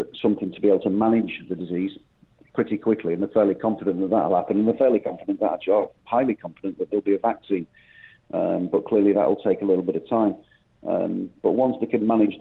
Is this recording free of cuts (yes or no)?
no